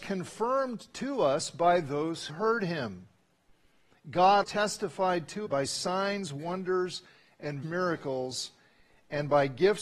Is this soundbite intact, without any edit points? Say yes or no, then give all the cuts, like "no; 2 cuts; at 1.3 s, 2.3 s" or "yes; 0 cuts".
no; 4 cuts; at 2.3 s, 4.4 s, 5.4 s, 7.6 s